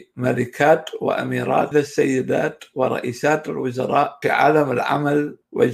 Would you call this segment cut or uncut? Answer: cut